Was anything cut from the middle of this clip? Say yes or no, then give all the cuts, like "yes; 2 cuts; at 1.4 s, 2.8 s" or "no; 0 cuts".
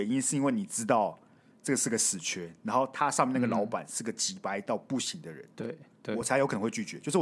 no; 0 cuts